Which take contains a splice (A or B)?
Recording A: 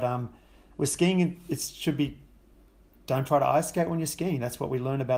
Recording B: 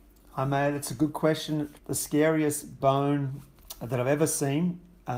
B